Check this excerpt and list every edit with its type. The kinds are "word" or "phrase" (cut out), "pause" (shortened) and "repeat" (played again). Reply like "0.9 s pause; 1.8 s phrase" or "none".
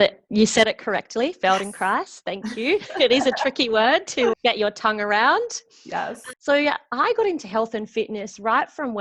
4.3 s word; 6.3 s word